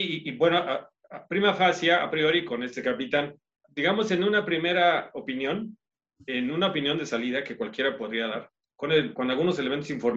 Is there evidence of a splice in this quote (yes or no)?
yes